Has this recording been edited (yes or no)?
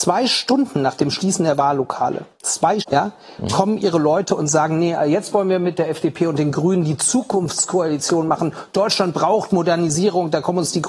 yes